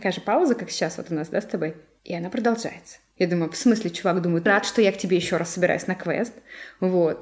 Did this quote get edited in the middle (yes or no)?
yes